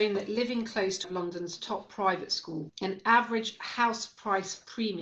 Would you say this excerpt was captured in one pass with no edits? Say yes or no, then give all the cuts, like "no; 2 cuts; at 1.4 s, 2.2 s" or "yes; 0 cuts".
no; 2 cuts; at 1.0 s, 2.7 s